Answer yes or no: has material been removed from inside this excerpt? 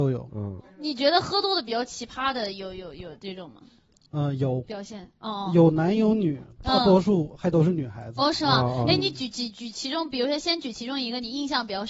no